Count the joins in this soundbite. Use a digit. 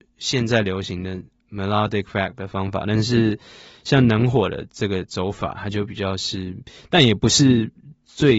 0